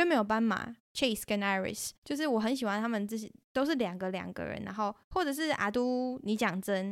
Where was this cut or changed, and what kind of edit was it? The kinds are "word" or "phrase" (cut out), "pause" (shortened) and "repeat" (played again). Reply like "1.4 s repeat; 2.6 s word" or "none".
2.0 s pause